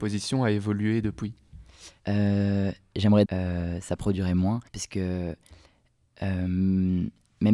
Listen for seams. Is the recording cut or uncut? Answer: cut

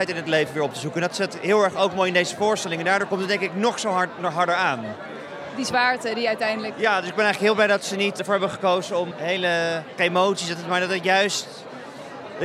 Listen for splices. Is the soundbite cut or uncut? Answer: cut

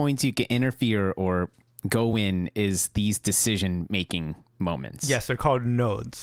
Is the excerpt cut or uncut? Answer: uncut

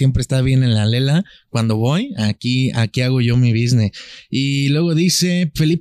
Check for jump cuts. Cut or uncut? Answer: uncut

